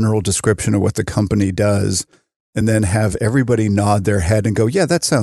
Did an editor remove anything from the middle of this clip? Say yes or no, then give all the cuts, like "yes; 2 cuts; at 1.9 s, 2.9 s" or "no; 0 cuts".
no; 0 cuts